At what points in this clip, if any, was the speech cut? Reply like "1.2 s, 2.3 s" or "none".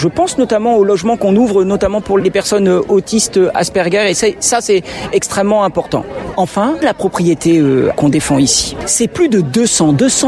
2.2 s, 6.8 s, 8.0 s